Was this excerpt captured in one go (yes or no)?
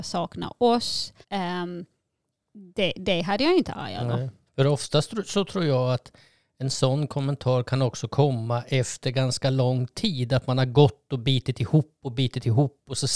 no